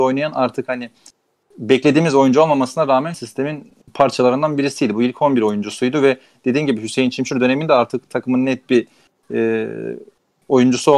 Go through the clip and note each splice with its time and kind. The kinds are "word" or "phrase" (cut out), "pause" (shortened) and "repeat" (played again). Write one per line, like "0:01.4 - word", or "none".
0:03.1 - phrase